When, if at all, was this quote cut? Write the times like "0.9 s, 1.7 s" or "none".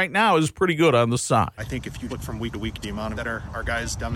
1.2 s, 1.6 s, 2.1 s, 2.5 s, 2.8 s, 3.1 s